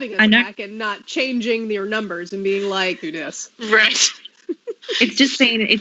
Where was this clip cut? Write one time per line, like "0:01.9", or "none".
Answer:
0:03.0